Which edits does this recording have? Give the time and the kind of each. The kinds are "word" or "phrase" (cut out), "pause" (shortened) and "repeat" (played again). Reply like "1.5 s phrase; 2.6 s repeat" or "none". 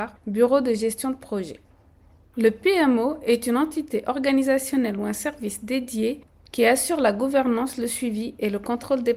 none